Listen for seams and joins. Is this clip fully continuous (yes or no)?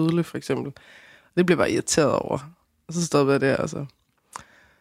yes